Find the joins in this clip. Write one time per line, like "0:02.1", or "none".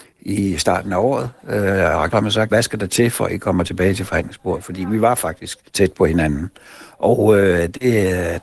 0:02.1
0:02.5
0:05.7

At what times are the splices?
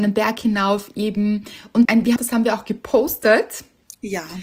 0:01.8
0:02.2

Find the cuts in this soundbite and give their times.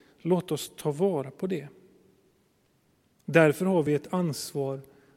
none

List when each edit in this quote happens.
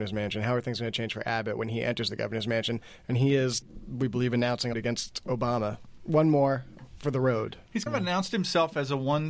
0:03.6
0:04.7
0:07.9

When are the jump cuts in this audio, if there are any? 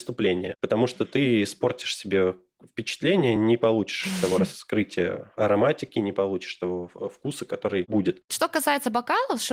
none

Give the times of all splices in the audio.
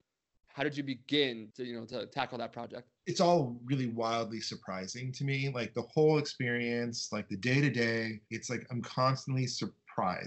0:03.0
0:08.2

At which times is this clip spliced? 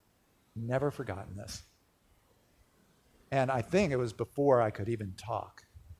none

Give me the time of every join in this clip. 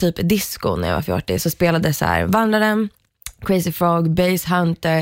none

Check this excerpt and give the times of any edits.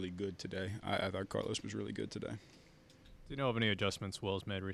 0:01.6

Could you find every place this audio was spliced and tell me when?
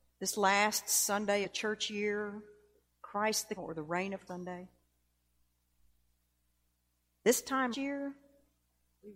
0:01.4
0:03.6
0:04.3
0:07.7

